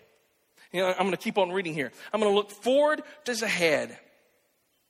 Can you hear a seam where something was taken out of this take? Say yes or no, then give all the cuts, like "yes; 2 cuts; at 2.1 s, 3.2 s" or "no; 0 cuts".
yes; 1 cut; at 3.3 s